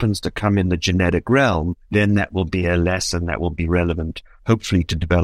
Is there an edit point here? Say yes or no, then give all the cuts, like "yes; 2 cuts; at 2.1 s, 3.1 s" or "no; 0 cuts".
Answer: yes; 1 cut; at 1.8 s